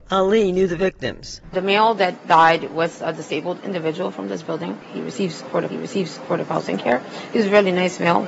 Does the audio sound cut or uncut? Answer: cut